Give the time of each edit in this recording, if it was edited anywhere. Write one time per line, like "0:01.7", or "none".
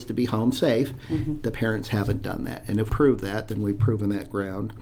0:02.9